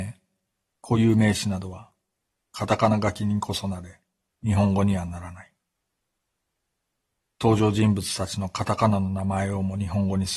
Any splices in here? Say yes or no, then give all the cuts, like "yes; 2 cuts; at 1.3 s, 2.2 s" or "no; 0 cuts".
no; 0 cuts